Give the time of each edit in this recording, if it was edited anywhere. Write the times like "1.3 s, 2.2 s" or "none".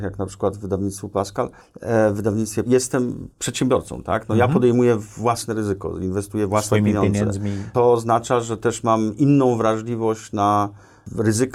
2.7 s, 3.3 s